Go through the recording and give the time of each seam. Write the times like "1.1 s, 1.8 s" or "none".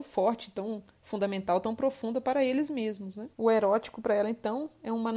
3.3 s